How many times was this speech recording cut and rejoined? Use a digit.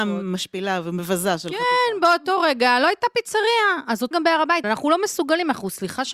2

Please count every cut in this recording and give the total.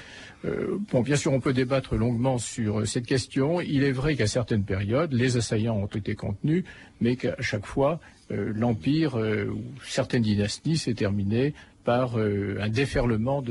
0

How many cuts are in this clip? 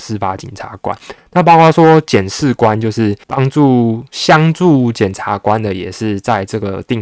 1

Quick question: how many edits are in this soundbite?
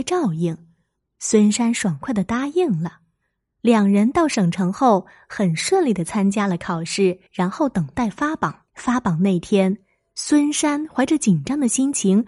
2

